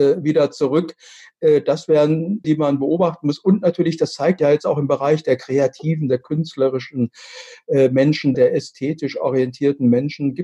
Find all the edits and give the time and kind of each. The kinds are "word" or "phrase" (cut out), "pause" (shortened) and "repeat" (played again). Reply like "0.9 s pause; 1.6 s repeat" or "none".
2.4 s word; 4.4 s word; 8.3 s word